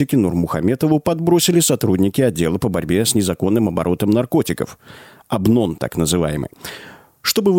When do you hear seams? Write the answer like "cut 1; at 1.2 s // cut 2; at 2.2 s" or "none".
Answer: none